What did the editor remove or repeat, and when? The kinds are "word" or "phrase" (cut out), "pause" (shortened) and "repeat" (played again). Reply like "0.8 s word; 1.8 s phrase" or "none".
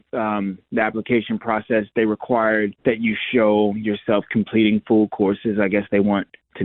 2.8 s pause